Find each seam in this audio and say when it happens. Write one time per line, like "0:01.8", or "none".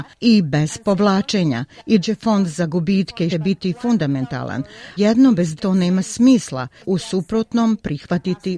0:02.0
0:03.3
0:05.0
0:05.6
0:06.8